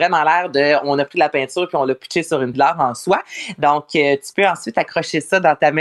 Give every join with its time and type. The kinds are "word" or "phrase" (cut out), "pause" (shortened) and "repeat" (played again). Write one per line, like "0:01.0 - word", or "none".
0:02.5 - phrase